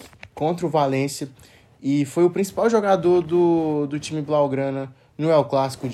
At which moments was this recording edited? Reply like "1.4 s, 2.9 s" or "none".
none